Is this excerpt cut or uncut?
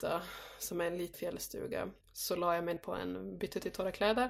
cut